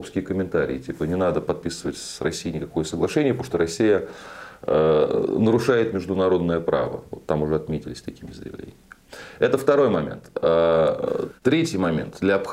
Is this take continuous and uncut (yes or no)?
no